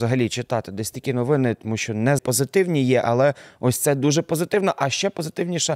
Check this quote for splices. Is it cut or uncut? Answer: cut